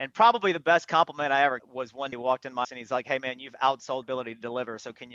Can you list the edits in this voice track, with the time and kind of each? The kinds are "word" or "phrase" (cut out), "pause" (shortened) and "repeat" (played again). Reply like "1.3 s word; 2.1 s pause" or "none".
1.6 s word; 2.1 s word; 2.6 s word; 4.0 s word